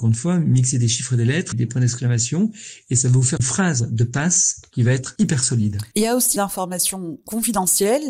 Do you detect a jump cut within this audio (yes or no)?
yes